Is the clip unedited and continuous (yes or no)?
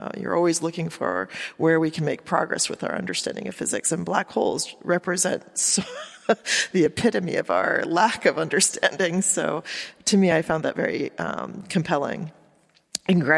yes